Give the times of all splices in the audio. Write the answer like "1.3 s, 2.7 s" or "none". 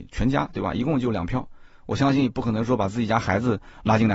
none